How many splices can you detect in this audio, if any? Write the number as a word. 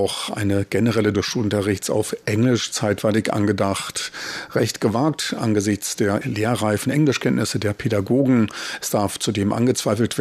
two